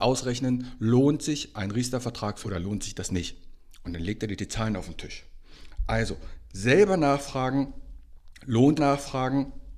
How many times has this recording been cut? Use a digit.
2